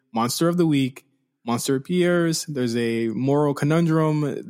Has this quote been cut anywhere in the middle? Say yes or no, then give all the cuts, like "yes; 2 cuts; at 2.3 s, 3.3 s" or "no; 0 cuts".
no; 0 cuts